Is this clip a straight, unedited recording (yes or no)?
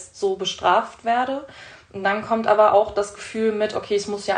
yes